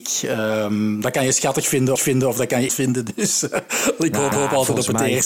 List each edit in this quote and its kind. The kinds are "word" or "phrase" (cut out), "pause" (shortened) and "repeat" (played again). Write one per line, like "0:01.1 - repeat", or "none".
0:02.0 - repeat
0:02.7 - word
0:04.3 - repeat